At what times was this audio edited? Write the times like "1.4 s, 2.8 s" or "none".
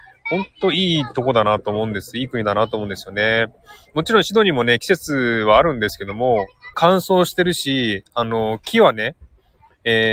6.7 s